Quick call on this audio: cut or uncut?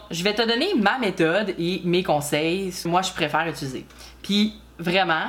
cut